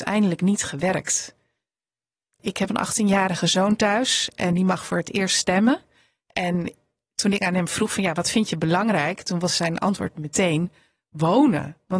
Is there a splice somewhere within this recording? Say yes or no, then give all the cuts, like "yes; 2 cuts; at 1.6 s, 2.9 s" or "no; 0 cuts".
yes; 1 cut; at 2.7 s